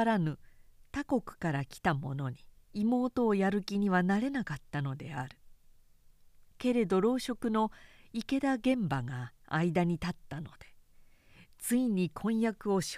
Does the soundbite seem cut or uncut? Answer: cut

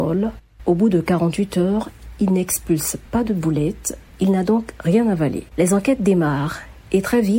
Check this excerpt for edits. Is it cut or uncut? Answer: cut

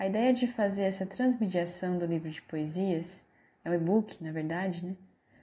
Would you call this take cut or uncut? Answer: uncut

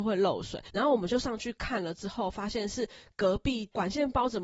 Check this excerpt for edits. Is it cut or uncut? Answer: uncut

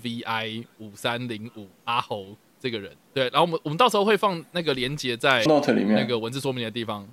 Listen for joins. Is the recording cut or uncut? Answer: cut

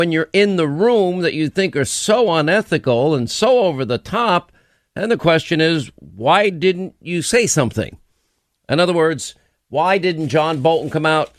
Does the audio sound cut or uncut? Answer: uncut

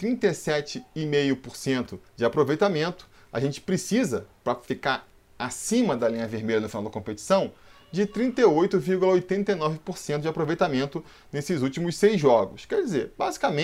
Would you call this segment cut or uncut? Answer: uncut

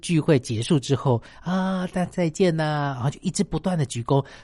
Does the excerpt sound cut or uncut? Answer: uncut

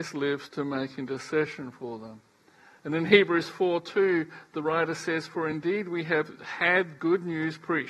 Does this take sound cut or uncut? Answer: uncut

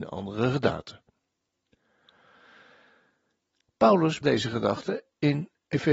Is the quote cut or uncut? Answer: cut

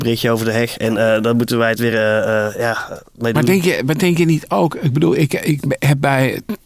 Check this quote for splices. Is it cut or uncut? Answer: uncut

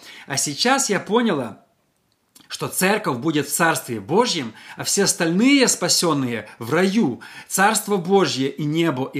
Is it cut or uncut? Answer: uncut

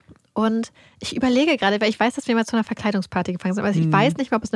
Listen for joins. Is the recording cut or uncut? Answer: uncut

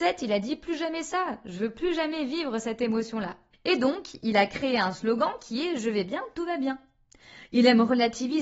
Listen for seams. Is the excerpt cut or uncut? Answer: cut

